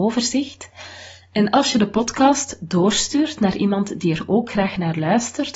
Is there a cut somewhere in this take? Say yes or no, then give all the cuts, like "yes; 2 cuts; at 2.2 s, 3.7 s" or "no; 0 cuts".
no; 0 cuts